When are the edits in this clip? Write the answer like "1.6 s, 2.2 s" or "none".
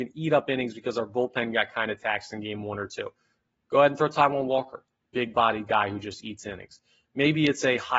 none